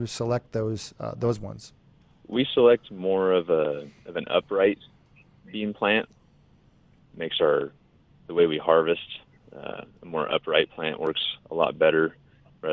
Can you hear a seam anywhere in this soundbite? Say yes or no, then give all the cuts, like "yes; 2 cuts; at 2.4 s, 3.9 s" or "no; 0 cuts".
no; 0 cuts